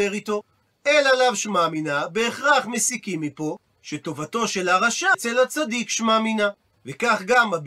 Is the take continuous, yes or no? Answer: no